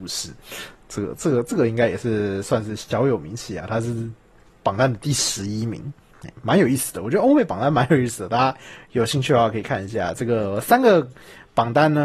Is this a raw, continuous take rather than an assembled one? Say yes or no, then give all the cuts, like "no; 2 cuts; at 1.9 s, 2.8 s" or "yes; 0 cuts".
yes; 0 cuts